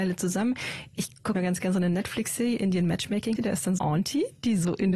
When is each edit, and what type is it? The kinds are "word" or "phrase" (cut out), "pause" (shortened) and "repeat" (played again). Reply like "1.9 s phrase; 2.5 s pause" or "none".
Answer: 1.3 s word; 3.4 s word; 3.8 s word